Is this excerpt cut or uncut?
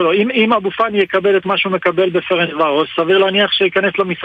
uncut